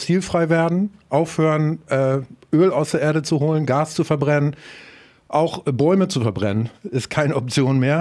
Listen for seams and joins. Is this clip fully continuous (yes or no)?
yes